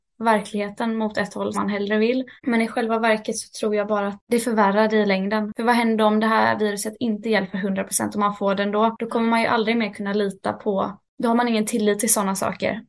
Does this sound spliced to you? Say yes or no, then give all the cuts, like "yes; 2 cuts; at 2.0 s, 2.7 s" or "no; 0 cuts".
yes; 2 cuts; at 1.5 s, 2.4 s